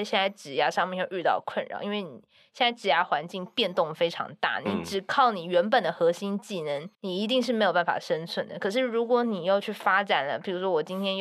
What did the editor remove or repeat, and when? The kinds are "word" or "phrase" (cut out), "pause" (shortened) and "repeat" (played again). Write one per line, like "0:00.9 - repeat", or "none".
0:06.9 - pause